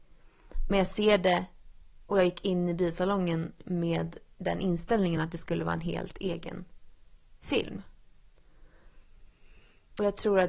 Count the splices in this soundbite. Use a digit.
0